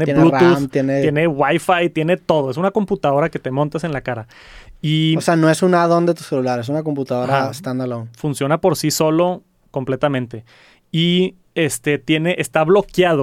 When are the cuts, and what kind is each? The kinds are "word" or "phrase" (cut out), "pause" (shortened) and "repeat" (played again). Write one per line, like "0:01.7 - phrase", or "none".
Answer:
none